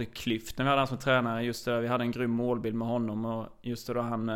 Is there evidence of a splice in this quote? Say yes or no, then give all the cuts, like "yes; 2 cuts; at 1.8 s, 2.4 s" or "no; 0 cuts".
no; 0 cuts